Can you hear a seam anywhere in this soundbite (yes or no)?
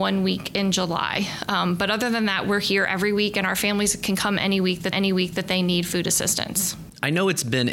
yes